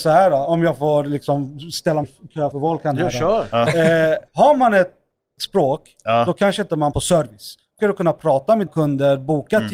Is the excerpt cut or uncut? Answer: cut